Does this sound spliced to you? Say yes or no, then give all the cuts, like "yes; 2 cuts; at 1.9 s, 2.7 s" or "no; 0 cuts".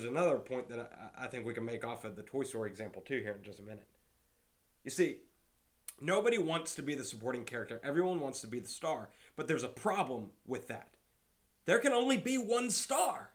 no; 0 cuts